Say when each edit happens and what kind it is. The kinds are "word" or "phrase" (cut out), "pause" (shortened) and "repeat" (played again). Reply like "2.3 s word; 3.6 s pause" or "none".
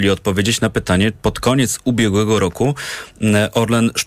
1.2 s word